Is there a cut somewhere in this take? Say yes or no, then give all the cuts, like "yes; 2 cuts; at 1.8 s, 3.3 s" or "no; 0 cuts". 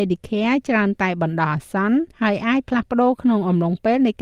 yes; 1 cut; at 2.1 s